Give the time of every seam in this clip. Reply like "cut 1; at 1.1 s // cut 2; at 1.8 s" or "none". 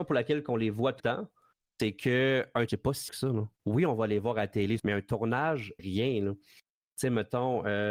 cut 1; at 1.0 s // cut 2; at 2.7 s // cut 3; at 3.1 s // cut 4; at 3.6 s // cut 5; at 4.8 s // cut 6; at 5.8 s